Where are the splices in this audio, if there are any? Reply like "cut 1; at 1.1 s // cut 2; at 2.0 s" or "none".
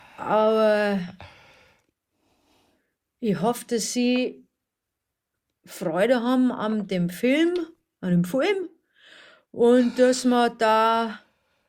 none